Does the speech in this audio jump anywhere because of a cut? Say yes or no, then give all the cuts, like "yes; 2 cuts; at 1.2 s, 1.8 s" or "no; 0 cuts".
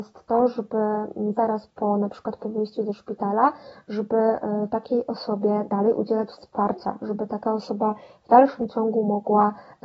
no; 0 cuts